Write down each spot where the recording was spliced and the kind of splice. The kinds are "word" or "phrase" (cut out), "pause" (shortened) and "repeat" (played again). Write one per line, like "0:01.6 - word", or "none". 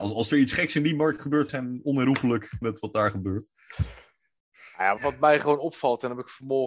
0:01.5 - word
0:02.6 - word
0:05.0 - word

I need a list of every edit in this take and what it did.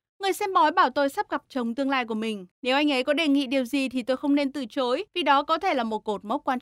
0:02.5 - pause
0:05.1 - pause

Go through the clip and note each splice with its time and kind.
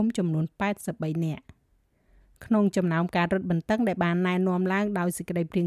none

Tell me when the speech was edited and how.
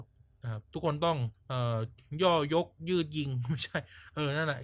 0:01.4 - pause

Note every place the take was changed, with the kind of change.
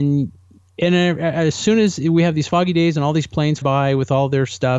0:03.6 - word

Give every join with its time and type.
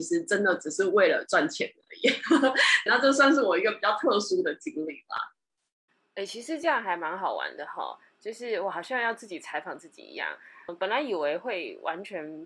0:02.9 - word
0:10.7 - word

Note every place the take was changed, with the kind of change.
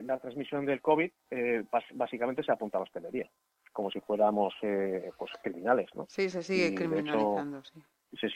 0:01.2 - pause

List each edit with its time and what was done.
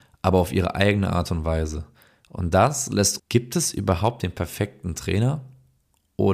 0:03.2 - phrase

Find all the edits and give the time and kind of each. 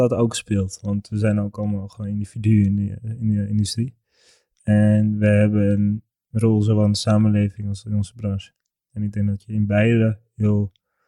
none

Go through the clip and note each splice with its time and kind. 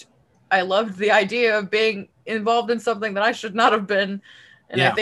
none

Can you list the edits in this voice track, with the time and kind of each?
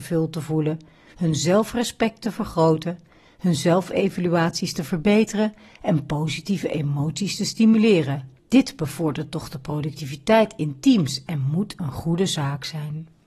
0:08.4 - pause

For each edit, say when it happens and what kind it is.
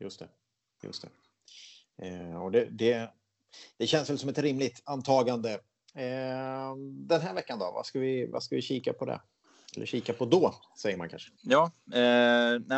0:11.4 - pause

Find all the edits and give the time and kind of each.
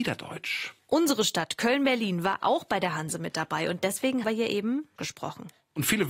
0:04.2 - word
0:05.0 - word

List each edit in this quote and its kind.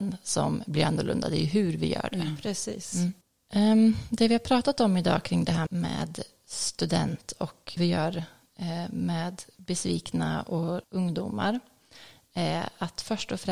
0:03.2 - pause
0:05.7 - word
0:07.8 - word
0:10.8 - word

